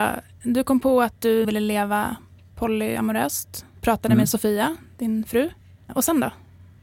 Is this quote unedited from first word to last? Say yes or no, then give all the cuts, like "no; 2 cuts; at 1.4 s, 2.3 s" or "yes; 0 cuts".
no; 1 cut; at 1.4 s